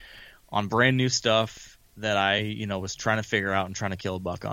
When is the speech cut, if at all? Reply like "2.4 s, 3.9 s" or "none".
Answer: none